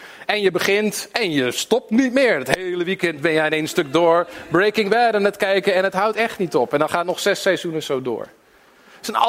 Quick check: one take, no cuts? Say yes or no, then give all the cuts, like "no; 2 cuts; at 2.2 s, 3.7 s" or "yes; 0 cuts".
yes; 0 cuts